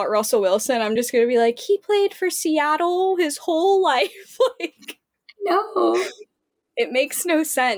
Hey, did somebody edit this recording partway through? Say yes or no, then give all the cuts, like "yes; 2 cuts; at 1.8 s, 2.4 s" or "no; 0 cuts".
no; 0 cuts